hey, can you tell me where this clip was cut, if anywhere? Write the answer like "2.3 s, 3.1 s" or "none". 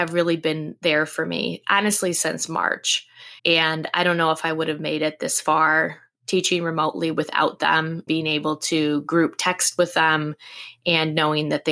3.4 s, 8.1 s